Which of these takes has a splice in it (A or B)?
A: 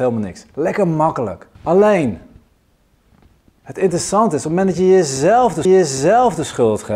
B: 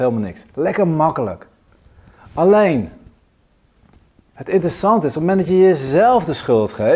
A